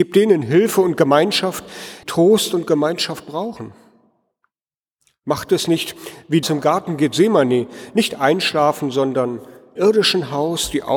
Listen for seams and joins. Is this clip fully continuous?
no; 3 cuts; at 2.0 s, 6.4 s, 9.8 s

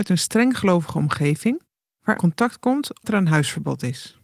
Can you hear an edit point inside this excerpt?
yes; 2 cuts; at 2.2 s, 3.0 s

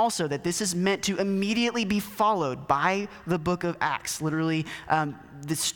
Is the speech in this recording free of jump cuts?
yes; 0 cuts

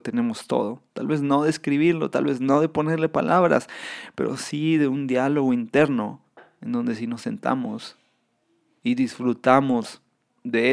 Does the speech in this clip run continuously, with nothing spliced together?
yes; 0 cuts

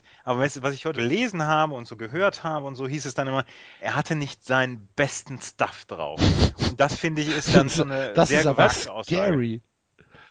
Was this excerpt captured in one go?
no; 2 cuts; at 0.9 s, 3.8 s

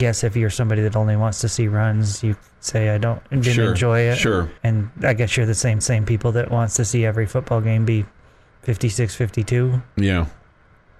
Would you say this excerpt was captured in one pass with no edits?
no; 2 cuts; at 4.6 s, 5.8 s

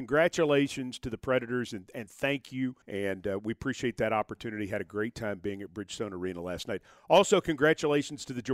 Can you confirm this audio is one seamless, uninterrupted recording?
no; 1 cut; at 2.8 s

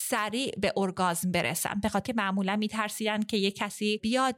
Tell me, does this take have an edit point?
yes; 1 cut; at 2.1 s

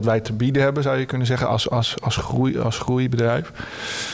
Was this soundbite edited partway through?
no; 0 cuts

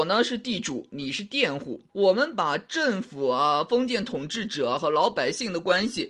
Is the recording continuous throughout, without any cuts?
no; 1 cut; at 1.9 s

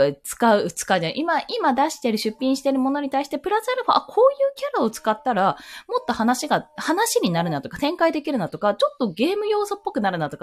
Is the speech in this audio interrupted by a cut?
no; 0 cuts

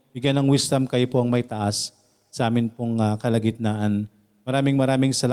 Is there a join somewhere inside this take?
no; 0 cuts

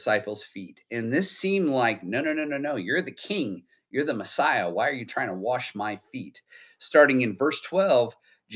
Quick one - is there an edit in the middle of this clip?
no; 0 cuts

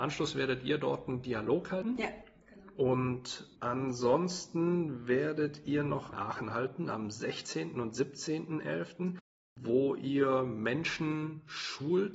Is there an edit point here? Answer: yes; 2 cuts; at 3.6 s, 6.1 s

